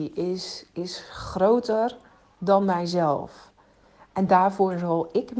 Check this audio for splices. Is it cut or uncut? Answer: uncut